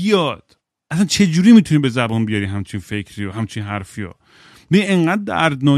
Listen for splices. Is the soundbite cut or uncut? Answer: uncut